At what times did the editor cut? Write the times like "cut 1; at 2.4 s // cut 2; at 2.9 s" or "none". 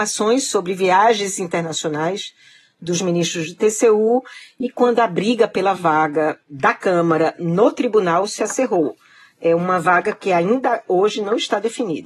none